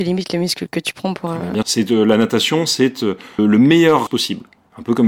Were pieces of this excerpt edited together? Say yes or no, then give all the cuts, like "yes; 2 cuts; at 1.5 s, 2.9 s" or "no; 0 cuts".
yes; 3 cuts; at 1.6 s, 3.4 s, 4.1 s